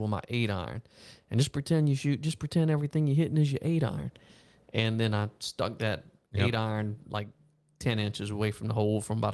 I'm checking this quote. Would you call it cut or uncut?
uncut